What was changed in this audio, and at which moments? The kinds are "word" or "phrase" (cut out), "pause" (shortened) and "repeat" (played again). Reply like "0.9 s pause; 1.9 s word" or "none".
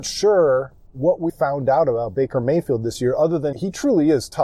1.3 s word; 3.5 s word